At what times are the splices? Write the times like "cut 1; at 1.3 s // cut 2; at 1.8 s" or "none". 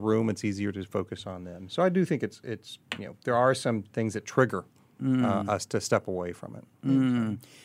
none